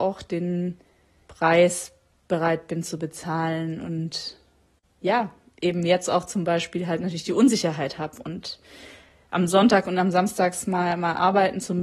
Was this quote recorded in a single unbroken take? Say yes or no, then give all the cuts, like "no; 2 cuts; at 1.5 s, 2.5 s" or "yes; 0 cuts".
yes; 0 cuts